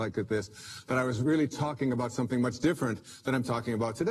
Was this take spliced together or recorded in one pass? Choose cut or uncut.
uncut